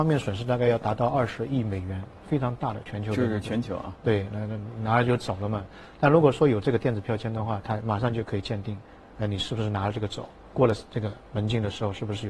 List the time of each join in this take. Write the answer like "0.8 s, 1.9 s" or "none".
none